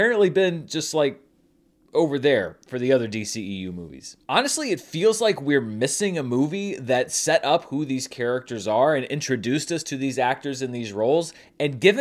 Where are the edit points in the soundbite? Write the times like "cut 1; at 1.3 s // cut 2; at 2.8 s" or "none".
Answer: none